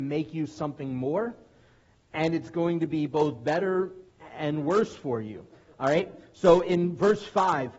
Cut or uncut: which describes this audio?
uncut